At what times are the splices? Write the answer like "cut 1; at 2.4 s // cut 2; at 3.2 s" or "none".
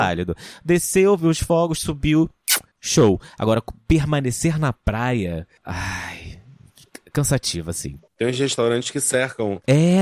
cut 1; at 8.1 s